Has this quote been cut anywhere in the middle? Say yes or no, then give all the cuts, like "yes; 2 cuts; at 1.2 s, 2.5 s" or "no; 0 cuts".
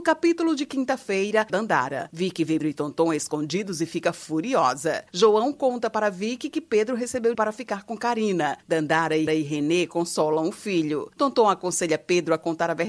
yes; 4 cuts; at 1.5 s, 2.6 s, 7.3 s, 9.3 s